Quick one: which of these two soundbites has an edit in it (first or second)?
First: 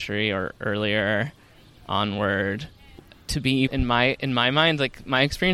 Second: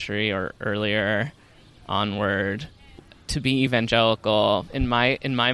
first